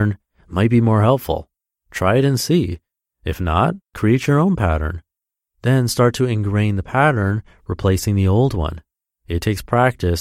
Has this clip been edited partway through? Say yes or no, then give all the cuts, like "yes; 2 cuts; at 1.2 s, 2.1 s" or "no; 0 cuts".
no; 0 cuts